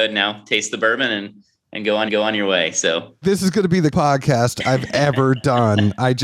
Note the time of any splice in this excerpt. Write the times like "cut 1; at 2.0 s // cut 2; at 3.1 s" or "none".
cut 1; at 2.1 s // cut 2; at 3.2 s // cut 3; at 3.9 s